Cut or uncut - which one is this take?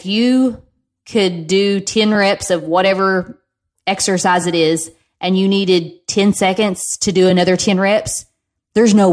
uncut